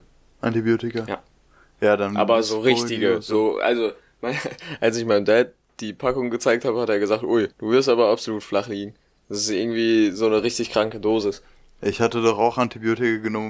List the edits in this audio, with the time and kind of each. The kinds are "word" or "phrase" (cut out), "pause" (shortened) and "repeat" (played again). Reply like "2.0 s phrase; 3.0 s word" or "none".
7.5 s pause